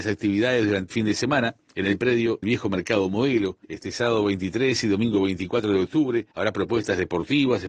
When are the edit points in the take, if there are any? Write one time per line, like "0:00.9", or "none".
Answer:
0:00.9
0:02.4
0:03.6
0:06.3

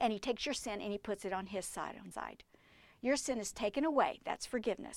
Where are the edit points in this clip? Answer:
0:02.1

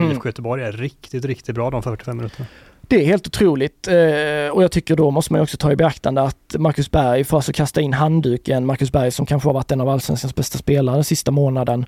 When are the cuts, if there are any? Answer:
none

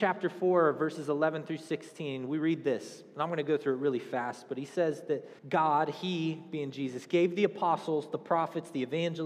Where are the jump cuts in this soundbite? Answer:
0:05.4

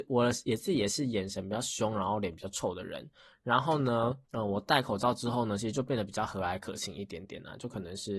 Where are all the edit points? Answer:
0:04.2

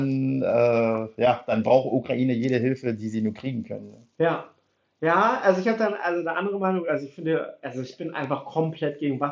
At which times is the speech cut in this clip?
0:04.1

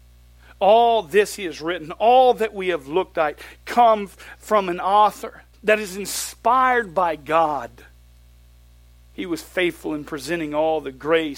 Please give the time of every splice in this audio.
0:05.5

